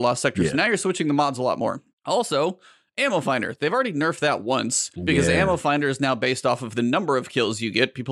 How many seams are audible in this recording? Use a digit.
2